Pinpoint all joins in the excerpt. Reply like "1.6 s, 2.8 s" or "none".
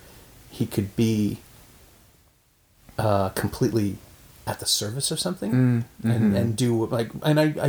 none